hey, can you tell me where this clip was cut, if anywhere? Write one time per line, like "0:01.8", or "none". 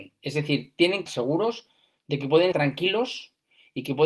0:01.1
0:02.5